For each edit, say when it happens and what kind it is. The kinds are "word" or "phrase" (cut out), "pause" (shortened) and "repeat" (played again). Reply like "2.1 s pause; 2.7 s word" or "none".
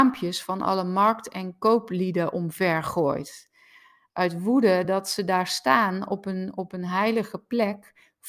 none